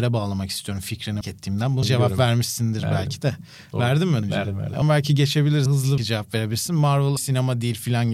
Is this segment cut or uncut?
cut